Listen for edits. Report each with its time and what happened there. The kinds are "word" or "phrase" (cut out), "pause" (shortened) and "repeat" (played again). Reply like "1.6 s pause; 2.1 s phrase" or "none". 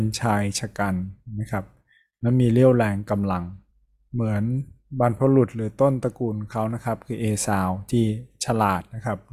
3.7 s pause